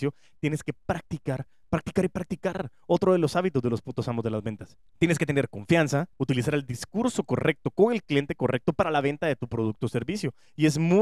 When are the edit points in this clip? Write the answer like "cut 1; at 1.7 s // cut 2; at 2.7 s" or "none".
cut 1; at 4.9 s // cut 2; at 6.1 s